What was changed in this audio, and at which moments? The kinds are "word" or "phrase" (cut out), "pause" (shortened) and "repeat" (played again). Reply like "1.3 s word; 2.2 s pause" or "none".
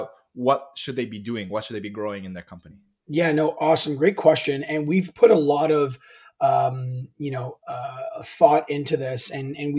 none

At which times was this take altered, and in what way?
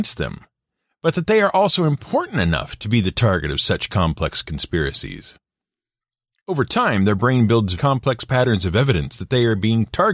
7.7 s word

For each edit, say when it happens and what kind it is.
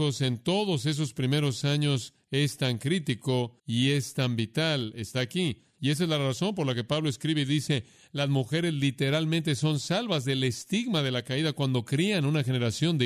3.6 s pause

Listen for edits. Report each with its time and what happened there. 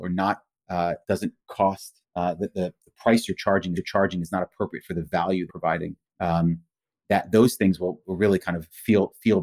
1.0 s pause; 2.0 s pause; 3.8 s repeat; 5.5 s phrase; 6.0 s pause; 8.0 s word

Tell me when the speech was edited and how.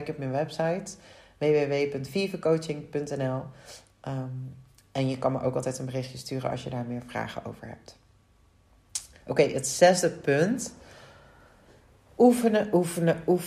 none

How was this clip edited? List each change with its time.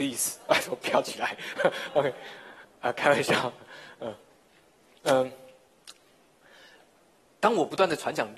none

